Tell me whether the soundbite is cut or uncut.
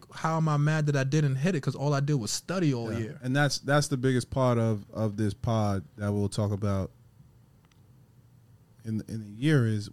uncut